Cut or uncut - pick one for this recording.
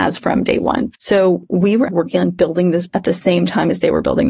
cut